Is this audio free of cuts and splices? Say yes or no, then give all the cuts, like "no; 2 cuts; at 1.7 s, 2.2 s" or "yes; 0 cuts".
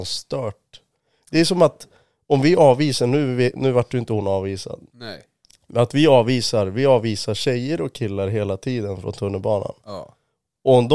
yes; 0 cuts